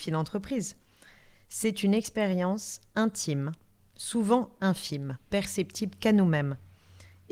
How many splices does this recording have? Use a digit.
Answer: 1